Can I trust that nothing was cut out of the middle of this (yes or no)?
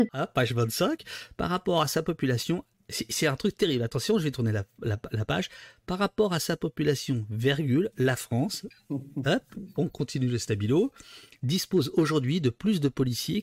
yes